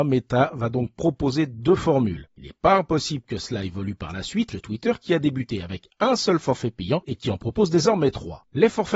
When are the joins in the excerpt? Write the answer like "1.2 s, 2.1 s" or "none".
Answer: 4.5 s